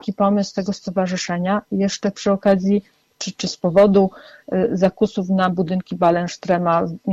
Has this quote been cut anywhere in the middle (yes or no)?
no